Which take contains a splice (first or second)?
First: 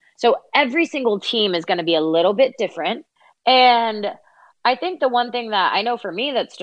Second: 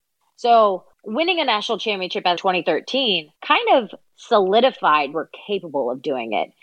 second